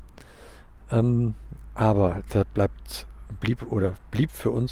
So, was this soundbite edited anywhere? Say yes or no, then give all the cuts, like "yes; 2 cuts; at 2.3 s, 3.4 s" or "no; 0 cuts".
no; 0 cuts